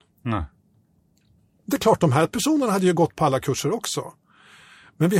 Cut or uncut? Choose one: uncut